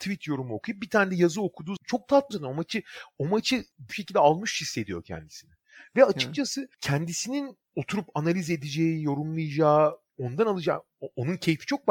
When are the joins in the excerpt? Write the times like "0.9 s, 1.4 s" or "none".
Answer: 1.8 s, 2.3 s, 3.9 s